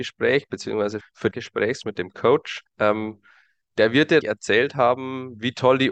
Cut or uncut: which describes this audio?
cut